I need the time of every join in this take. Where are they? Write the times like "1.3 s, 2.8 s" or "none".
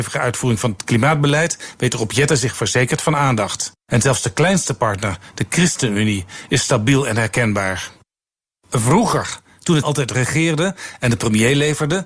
3.8 s, 9.8 s